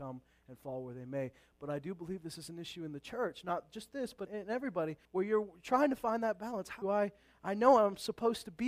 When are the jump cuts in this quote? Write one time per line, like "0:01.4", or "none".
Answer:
0:04.3
0:05.0
0:06.8